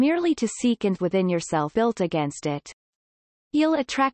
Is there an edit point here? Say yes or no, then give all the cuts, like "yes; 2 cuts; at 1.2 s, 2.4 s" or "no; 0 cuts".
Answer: yes; 2 cuts; at 1.0 s, 1.7 s